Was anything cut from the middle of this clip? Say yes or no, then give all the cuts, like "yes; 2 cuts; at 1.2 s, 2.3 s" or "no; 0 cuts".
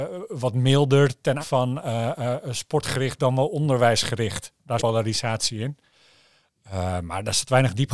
yes; 2 cuts; at 1.4 s, 4.8 s